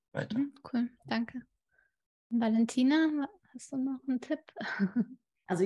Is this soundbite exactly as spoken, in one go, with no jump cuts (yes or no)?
yes